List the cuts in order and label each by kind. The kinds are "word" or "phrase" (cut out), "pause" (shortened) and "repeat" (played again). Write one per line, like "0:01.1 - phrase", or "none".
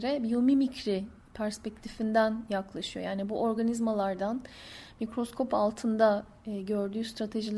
none